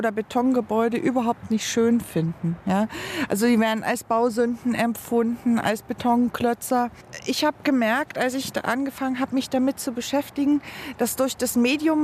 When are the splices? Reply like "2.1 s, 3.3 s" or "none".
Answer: none